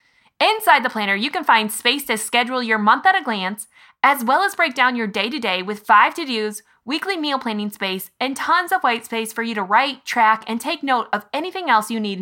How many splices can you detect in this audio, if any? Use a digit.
0